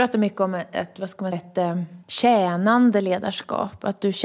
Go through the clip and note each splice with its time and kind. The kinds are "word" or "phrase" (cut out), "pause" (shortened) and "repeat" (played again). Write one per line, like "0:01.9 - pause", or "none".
0:01.3 - word
0:02.0 - pause